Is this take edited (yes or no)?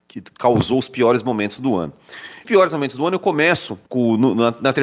yes